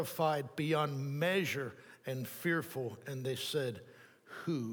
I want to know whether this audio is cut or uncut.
uncut